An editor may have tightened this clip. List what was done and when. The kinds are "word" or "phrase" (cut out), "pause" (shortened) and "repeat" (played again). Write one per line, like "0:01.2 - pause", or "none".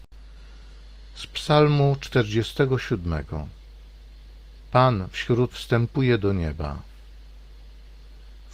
0:05.5 - word